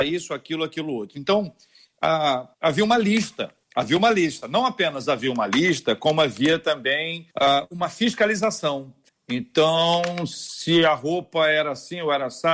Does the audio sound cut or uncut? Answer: cut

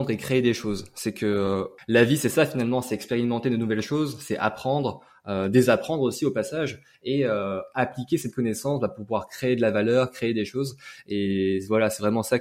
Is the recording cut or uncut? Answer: uncut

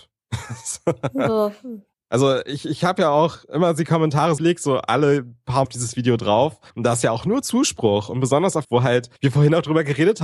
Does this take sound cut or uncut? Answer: cut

